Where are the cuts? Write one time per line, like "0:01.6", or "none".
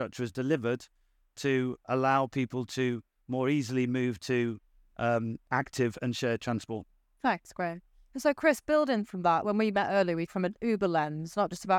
0:09.4
0:10.3